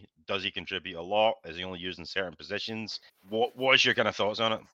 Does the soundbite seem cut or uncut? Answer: cut